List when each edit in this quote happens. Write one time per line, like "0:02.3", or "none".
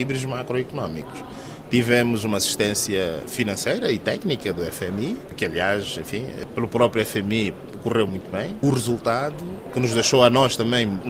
none